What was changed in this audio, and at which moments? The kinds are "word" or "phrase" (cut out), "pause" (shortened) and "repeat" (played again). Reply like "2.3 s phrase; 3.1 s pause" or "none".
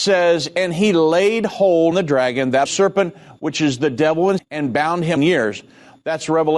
1.9 s word; 2.7 s word; 4.4 s word; 5.2 s phrase